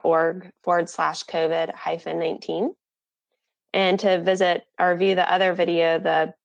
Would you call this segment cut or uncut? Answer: uncut